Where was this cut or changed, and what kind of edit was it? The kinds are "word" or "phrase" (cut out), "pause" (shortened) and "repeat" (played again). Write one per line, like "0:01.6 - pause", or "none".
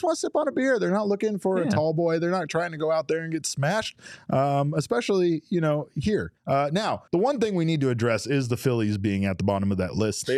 0:06.4 - pause
0:07.1 - pause